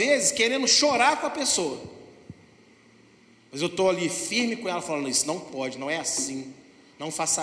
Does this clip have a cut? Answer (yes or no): no